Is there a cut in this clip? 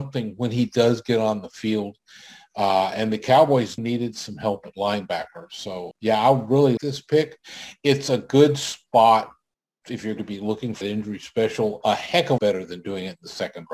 yes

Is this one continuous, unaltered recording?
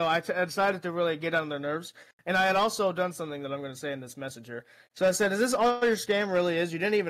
yes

